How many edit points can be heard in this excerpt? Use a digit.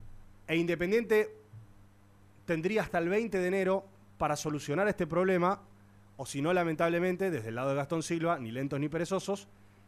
0